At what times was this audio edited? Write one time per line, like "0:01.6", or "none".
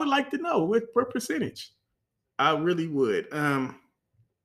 0:02.0

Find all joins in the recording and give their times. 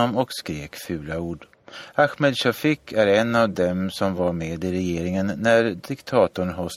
none

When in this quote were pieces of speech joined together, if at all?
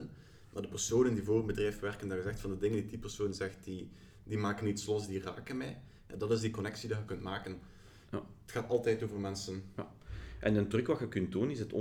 0:07.1

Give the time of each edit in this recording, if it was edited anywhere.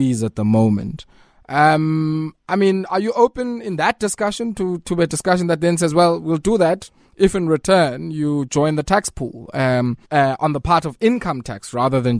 0:10.0

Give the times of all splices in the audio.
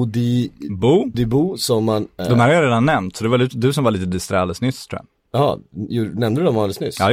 0:01.1

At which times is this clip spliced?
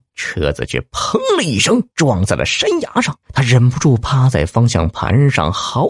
0:01.9
0:03.2

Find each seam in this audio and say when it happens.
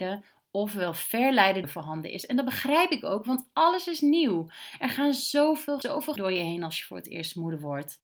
0:01.6
0:05.8
0:06.2

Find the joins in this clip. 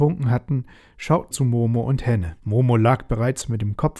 0:01.3
0:02.4

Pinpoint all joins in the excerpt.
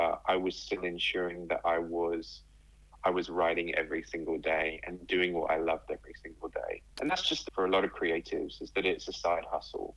0:06.9
0:07.5

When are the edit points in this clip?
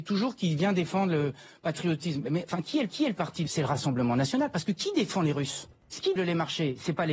0:02.9
0:03.5
0:06.2

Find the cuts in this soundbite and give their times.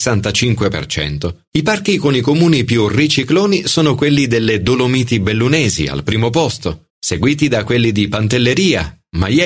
0:01.5
0:06.9

